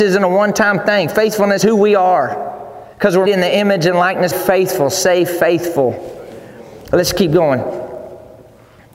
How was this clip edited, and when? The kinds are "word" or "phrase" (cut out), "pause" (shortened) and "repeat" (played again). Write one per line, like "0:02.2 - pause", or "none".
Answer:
0:01.6 - word
0:02.9 - pause
0:03.3 - word
0:04.3 - phrase